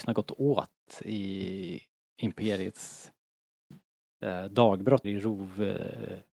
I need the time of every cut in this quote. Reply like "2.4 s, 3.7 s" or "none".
5.0 s